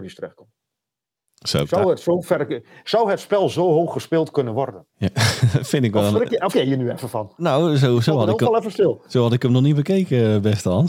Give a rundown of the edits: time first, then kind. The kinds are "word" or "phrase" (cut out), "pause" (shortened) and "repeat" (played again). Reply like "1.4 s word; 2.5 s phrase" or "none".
4.9 s pause; 6.5 s word